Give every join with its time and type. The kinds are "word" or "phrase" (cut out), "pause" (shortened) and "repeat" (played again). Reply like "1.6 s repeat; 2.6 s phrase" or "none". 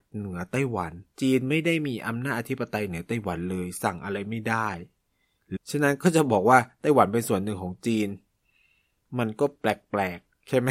1.1 s pause; 5.6 s phrase